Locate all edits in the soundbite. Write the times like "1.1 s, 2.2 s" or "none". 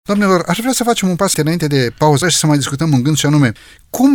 1.3 s, 2.2 s